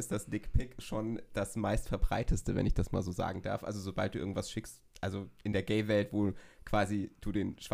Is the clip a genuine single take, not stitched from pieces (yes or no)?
yes